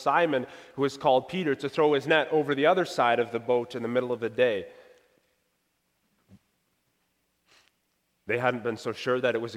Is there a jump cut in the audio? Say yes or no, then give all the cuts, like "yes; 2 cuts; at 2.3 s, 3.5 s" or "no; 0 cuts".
no; 0 cuts